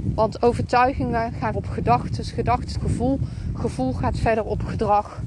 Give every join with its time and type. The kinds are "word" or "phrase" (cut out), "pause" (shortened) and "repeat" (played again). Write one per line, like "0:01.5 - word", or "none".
0:01.5 - word
0:02.7 - phrase